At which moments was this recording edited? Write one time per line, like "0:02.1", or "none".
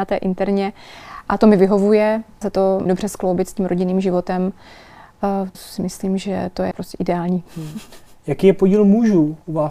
0:02.4
0:02.9
0:05.5
0:06.7